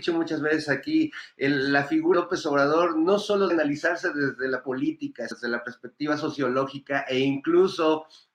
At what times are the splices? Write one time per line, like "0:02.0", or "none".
0:02.1
0:03.5
0:04.6
0:05.3